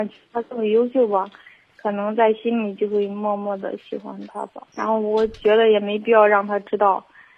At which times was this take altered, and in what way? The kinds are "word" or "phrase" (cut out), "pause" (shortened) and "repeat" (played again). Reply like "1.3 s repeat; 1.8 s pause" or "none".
4.7 s pause